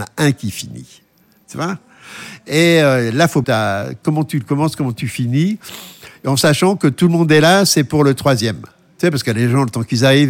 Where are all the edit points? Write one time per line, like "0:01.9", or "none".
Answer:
0:03.4